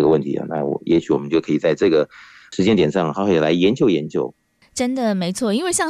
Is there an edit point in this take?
no; 0 cuts

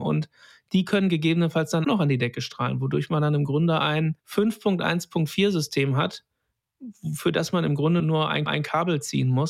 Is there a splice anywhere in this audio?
yes; 4 cuts; at 1.8 s, 4.2 s, 8.0 s, 8.5 s

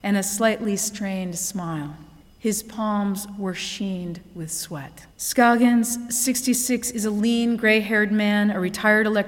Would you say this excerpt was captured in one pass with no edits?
no; 2 cuts; at 2.2 s, 5.1 s

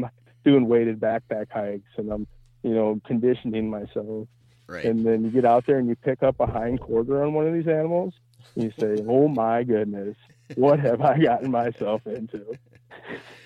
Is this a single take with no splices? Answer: yes; 0 cuts

